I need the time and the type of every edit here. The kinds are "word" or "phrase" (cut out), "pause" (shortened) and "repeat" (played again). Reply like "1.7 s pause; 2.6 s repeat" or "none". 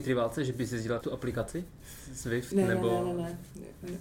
1.0 s word